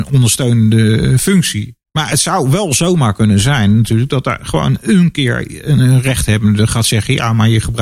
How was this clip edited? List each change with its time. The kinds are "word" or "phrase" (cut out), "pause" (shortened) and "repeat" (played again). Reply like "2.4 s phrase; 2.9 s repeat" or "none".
1.8 s pause